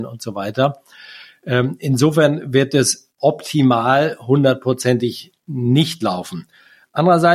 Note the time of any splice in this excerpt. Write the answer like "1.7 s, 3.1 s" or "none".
none